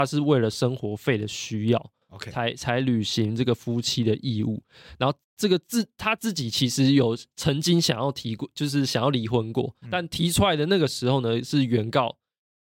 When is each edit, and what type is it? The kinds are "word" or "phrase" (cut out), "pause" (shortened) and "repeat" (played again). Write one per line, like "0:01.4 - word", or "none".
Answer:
0:05.2 - pause